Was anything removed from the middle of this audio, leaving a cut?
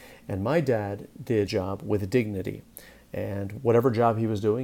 yes; 1 cut; at 1.5 s

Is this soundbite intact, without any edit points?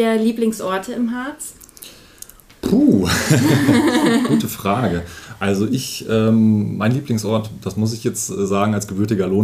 yes; 0 cuts

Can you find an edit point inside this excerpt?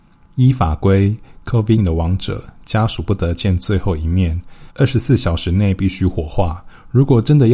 yes; 2 cuts; at 1.8 s, 4.7 s

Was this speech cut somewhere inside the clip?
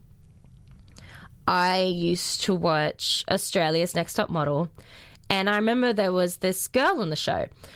no; 0 cuts

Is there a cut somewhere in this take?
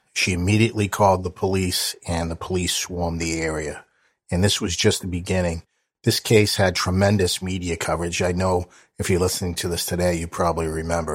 no; 0 cuts

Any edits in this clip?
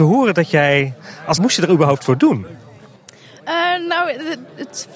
yes; 1 cut; at 1.4 s

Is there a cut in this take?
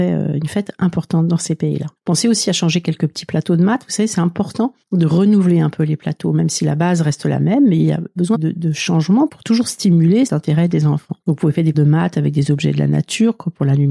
yes; 7 cuts; at 2.0 s, 4.8 s, 8.3 s, 9.3 s, 10.3 s, 11.2 s, 11.7 s

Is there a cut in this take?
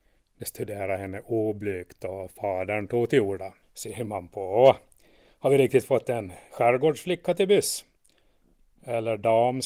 yes; 1 cut; at 3.6 s

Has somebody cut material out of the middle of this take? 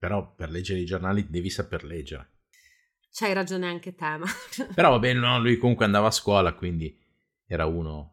no; 0 cuts

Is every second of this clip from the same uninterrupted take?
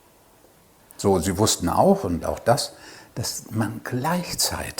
yes; 0 cuts

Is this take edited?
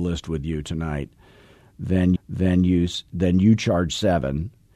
yes; 1 cut; at 2.2 s

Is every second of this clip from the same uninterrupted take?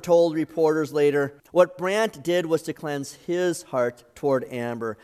no; 1 cut; at 1.4 s

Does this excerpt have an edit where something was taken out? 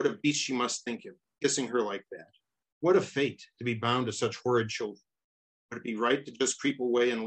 no; 0 cuts

